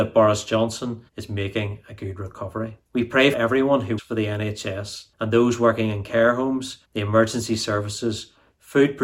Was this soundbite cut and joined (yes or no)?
yes